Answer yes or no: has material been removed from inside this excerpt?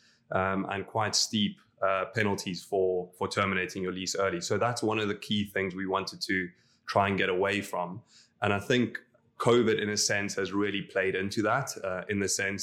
no